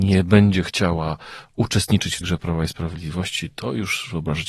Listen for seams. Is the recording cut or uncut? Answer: cut